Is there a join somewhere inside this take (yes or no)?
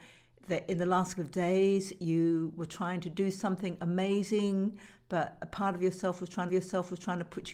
yes